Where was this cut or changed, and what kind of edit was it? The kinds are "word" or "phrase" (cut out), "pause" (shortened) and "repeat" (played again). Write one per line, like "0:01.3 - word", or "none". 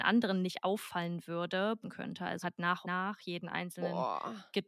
0:01.8 - phrase
0:02.4 - word
0:02.8 - word